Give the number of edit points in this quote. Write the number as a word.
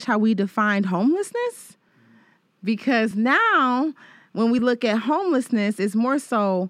zero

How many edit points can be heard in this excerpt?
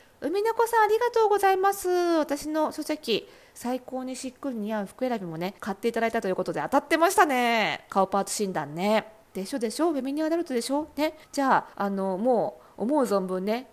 three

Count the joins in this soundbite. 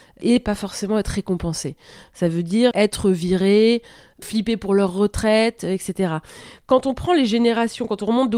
one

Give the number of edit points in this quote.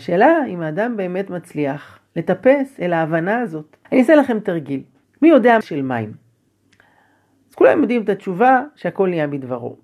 three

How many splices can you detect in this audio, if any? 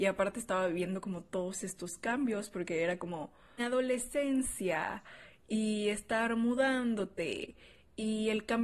one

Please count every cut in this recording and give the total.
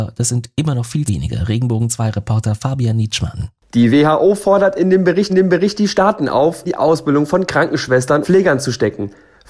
four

